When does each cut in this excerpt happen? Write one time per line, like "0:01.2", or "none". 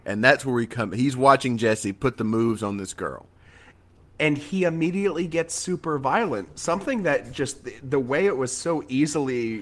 none